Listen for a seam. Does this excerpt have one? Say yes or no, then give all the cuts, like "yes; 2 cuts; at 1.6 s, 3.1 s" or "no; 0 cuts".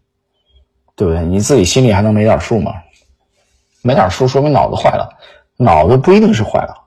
no; 0 cuts